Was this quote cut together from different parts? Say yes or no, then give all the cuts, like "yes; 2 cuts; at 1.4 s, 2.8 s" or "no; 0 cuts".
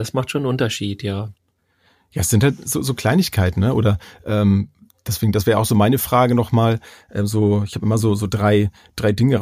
no; 0 cuts